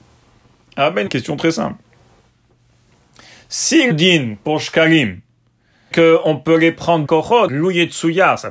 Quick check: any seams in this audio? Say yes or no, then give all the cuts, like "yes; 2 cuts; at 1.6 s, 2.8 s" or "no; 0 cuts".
yes; 5 cuts; at 1.1 s, 3.9 s, 5.9 s, 7.0 s, 7.5 s